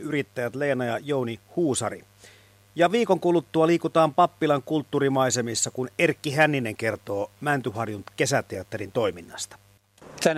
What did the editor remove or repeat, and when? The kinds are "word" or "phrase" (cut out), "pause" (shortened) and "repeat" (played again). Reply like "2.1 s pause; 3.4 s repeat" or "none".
none